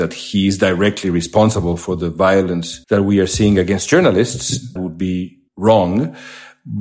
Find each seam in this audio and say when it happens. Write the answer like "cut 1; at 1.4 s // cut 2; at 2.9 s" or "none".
cut 1; at 2.8 s // cut 2; at 4.8 s // cut 3; at 5.5 s